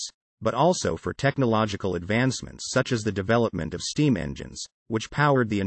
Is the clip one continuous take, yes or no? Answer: yes